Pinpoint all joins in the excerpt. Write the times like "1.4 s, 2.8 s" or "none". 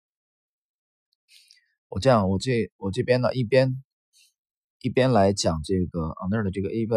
none